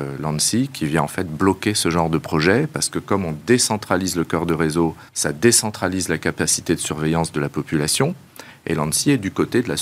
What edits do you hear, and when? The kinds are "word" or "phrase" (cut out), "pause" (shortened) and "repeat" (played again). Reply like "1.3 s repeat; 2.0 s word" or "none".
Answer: 5.1 s pause